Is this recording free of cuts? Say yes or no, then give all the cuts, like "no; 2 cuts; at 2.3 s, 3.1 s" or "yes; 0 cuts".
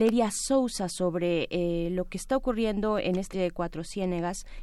no; 1 cut; at 3.3 s